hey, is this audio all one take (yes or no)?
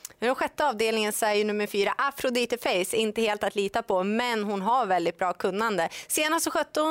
yes